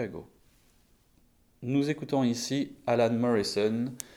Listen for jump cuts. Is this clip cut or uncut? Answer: uncut